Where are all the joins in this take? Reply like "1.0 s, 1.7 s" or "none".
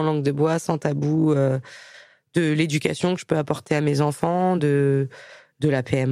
none